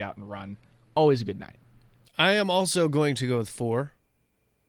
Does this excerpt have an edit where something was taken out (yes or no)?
no